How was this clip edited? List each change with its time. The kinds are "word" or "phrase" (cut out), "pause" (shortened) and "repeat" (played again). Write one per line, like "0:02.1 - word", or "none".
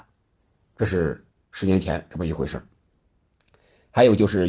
none